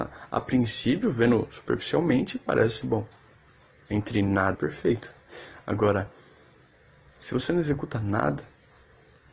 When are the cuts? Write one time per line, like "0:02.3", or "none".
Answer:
0:02.8
0:04.5